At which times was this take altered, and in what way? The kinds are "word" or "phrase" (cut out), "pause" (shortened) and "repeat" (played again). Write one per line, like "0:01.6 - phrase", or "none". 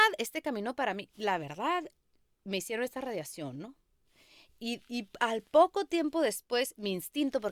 none